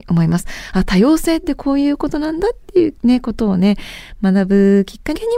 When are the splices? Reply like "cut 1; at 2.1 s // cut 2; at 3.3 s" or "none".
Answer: cut 1; at 3.0 s